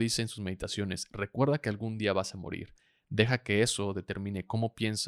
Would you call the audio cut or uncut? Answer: uncut